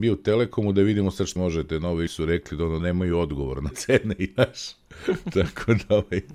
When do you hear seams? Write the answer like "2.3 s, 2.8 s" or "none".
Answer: 1.4 s, 2.1 s, 2.8 s, 3.7 s, 4.4 s